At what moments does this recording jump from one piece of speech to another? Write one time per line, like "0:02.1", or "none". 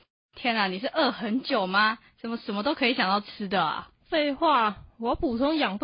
0:04.0